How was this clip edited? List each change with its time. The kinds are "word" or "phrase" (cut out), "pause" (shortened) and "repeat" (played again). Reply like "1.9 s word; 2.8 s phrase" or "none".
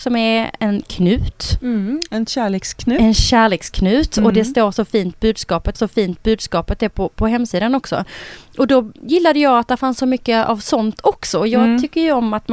5.7 s repeat